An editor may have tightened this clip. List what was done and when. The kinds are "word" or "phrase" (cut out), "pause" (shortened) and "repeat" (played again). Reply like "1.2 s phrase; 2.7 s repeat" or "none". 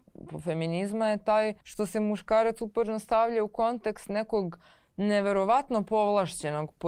1.6 s pause

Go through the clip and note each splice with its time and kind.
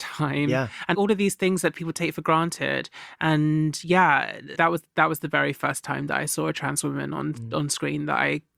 0.9 s word; 4.5 s word

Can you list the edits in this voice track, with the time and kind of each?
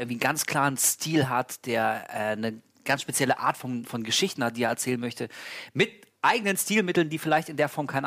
none

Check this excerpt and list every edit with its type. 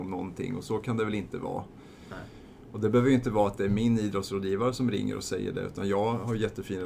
none

